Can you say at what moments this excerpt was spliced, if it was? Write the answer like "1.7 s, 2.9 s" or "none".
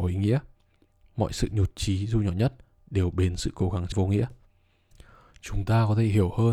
3.9 s